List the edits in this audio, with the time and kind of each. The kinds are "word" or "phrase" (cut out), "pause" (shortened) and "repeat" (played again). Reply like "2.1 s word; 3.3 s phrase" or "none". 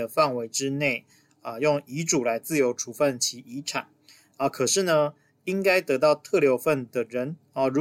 none

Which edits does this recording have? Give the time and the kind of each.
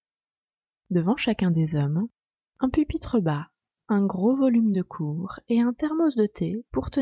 none

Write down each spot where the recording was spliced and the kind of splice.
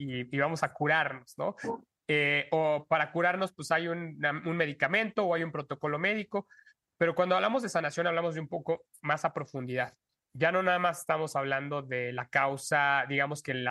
none

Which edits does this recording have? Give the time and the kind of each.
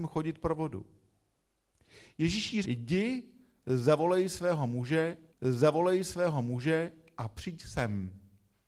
2.6 s word; 5.3 s repeat

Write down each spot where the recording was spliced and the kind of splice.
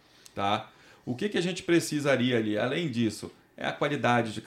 none

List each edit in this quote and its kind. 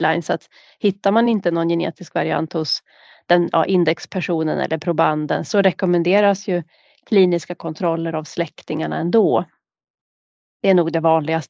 none

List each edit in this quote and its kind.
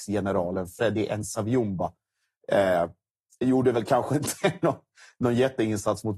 none

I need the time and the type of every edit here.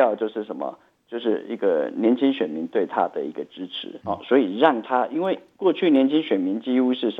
4.0 s word

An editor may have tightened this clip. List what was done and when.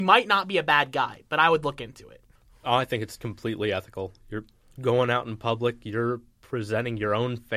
none

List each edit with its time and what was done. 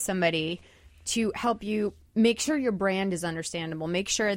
2.0 s pause

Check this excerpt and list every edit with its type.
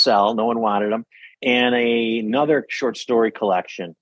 none

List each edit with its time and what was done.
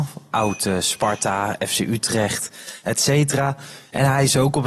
none

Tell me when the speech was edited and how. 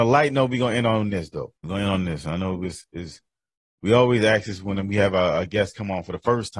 1.6 s pause

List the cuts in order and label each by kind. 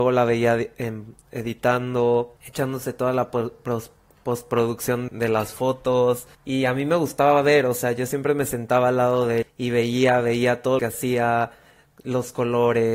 2.4 s pause; 5.1 s word; 6.3 s pause; 9.4 s word; 10.8 s word

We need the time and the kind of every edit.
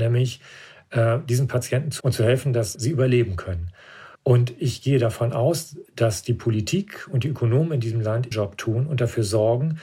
2.0 s word; 2.7 s word; 4.1 s pause; 8.3 s word

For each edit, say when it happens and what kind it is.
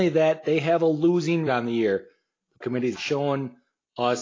1.5 s word; 2.6 s word; 3.0 s word

